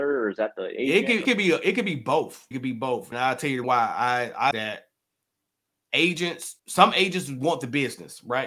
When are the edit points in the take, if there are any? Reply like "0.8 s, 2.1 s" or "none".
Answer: 1.2 s, 2.5 s, 3.1 s, 3.6 s, 4.5 s, 6.6 s